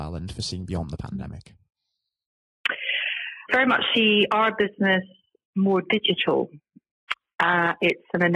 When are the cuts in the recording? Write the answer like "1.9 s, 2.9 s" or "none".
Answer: 3.5 s, 5.4 s